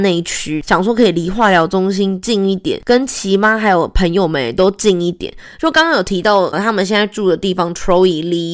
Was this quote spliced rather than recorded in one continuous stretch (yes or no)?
yes